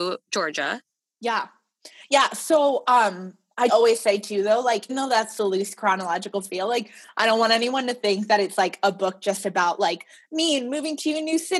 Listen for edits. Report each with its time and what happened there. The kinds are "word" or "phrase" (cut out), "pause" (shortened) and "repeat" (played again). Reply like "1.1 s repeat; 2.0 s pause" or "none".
3.7 s word; 4.9 s word

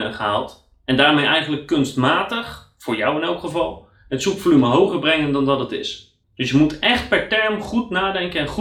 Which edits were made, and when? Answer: 6.2 s pause

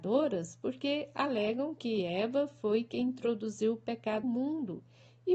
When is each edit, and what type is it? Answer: 4.2 s word

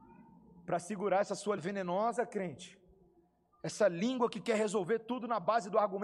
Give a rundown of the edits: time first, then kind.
1.6 s word

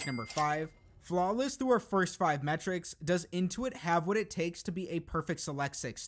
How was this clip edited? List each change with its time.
none

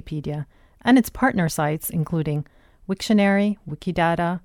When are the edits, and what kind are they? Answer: none

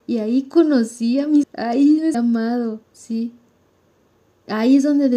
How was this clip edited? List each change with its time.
1.4 s word; 2.1 s word; 2.8 s pause

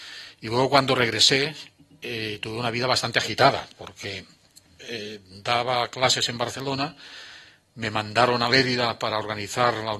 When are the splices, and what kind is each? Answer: none

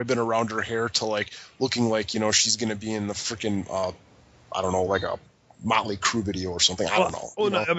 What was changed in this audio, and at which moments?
none

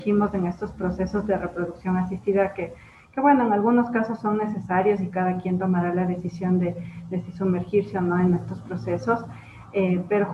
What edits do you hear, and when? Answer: none

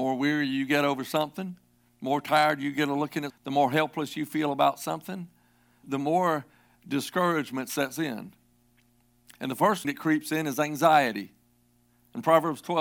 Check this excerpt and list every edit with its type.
3.3 s word; 5.8 s word; 6.8 s word; 9.8 s word

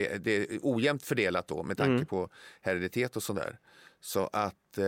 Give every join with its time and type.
none

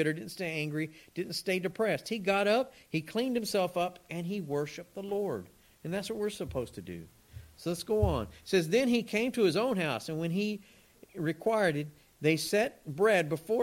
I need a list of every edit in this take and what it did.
none

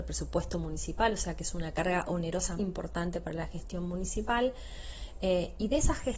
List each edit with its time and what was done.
2.6 s word

